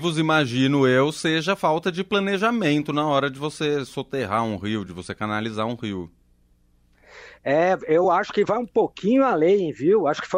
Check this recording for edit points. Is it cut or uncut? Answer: uncut